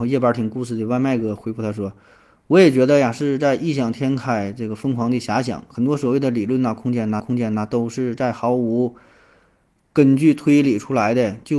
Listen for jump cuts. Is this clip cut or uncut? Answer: cut